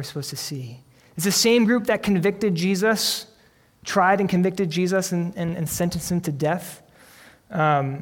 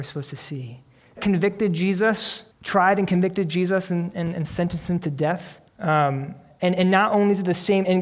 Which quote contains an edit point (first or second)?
second